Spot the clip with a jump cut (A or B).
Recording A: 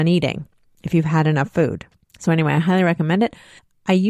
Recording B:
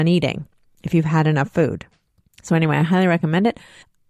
A